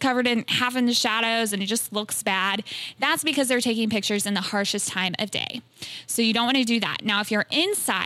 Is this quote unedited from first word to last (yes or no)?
yes